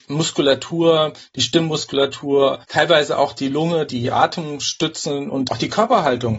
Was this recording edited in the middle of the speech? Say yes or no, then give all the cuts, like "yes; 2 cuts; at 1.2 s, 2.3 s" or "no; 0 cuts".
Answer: yes; 1 cut; at 2.6 s